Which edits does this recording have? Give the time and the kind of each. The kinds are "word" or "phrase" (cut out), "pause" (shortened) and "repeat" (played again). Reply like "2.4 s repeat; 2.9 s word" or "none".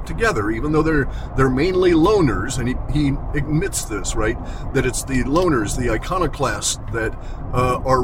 none